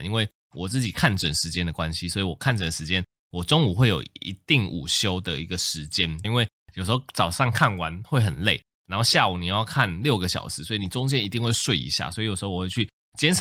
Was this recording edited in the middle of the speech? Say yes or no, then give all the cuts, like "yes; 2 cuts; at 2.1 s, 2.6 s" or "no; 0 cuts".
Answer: yes; 1 cut; at 6.2 s